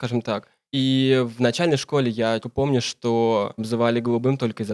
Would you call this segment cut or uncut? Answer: cut